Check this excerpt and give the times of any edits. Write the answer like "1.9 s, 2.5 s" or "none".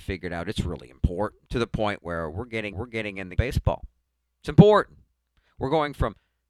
1.5 s, 2.7 s, 3.4 s, 4.1 s